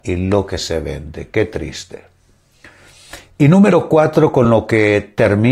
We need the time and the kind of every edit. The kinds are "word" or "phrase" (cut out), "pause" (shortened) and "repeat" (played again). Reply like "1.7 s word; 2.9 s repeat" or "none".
none